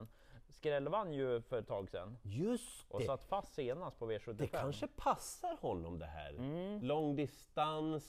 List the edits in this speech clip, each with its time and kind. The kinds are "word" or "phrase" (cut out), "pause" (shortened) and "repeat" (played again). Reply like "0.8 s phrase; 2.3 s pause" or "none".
none